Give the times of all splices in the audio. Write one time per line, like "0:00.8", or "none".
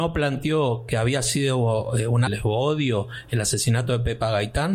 0:02.3